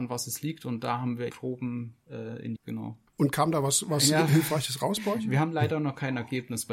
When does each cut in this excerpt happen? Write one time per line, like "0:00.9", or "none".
0:01.3
0:02.6
0:03.1